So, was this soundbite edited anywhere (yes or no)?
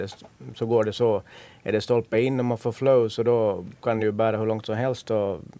no